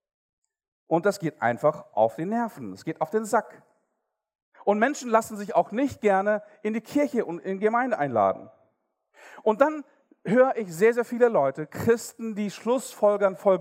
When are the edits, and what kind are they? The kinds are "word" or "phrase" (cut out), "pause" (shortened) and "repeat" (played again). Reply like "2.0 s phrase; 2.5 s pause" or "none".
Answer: none